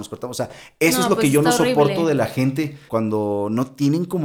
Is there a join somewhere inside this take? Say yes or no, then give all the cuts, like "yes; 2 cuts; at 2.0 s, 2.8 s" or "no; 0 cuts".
yes; 1 cut; at 2.9 s